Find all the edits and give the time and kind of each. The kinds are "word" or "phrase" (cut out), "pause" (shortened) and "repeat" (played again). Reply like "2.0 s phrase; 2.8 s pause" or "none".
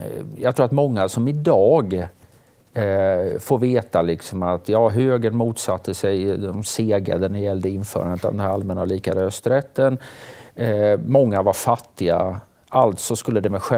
none

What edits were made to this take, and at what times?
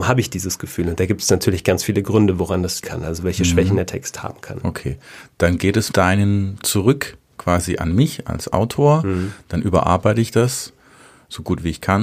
2.8 s word; 5.9 s word; 6.6 s word

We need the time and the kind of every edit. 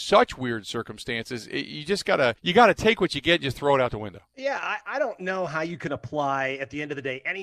2.4 s pause; 4.3 s pause

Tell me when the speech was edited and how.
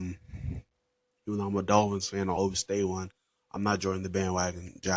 none

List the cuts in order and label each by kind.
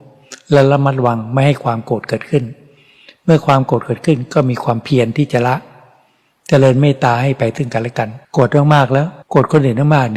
8.2 s pause; 9.2 s pause

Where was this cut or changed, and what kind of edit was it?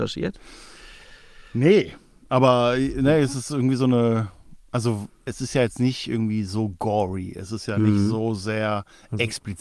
5.3 s word

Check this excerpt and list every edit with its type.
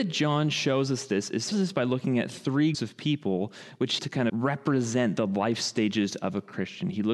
1.5 s word; 2.7 s word; 4.0 s word; 4.3 s word

